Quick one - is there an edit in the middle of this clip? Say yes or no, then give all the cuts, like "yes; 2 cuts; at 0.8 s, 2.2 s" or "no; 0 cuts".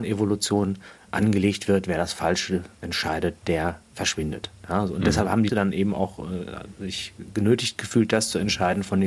yes; 3 cuts; at 1.1 s, 3.8 s, 5.5 s